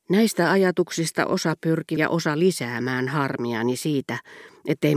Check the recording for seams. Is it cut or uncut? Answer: cut